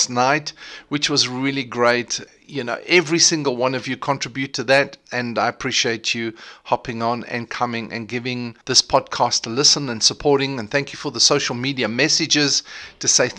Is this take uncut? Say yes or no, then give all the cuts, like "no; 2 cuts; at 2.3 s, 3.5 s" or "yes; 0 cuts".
no; 1 cut; at 8.6 s